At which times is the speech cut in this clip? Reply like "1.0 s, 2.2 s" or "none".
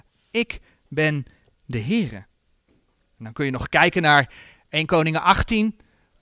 none